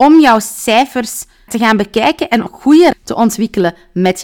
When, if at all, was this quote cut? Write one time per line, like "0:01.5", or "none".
0:01.5
0:02.5
0:02.9